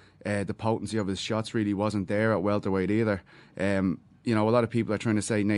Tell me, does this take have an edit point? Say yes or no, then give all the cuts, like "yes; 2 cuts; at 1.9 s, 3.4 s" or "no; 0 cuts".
no; 0 cuts